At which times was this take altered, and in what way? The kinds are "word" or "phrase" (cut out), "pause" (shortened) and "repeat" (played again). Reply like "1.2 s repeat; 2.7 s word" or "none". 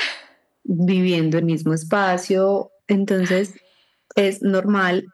1.4 s word; 2.8 s pause

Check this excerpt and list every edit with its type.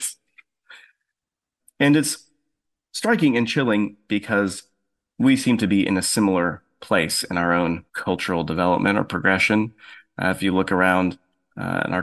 1.6 s word; 7.9 s pause

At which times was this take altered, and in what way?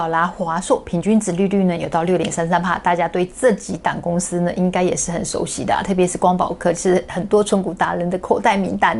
none

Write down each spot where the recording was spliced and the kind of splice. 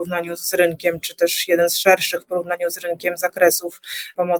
none

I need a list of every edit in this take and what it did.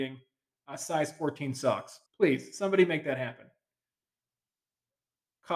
2.1 s pause

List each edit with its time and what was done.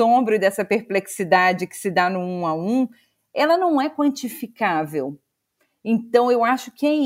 none

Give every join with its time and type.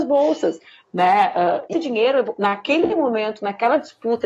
1.7 s word

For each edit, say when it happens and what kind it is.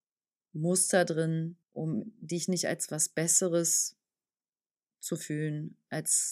1.6 s pause

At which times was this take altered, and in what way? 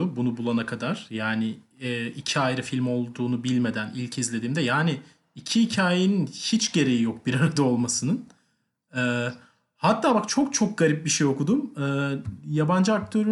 10.3 s word

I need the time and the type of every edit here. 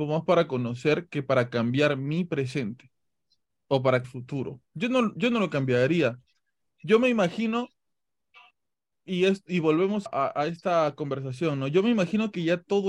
4.0 s phrase; 4.7 s pause; 10.1 s word

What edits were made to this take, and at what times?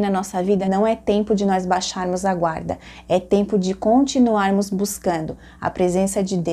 none

